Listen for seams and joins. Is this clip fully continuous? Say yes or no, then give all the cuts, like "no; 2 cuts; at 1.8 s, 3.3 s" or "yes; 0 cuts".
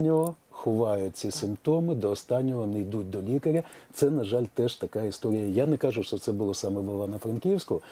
yes; 0 cuts